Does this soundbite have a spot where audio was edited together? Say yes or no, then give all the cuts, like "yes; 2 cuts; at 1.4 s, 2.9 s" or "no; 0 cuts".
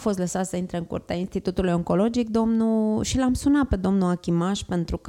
no; 0 cuts